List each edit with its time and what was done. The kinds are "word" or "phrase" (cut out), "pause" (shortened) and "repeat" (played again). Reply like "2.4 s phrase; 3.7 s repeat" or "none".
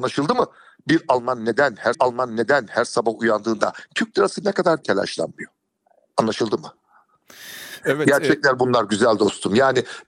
1.9 s repeat; 4.8 s phrase; 5.9 s pause